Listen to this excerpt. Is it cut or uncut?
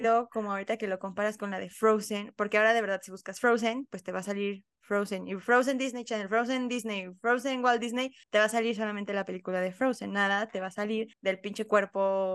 cut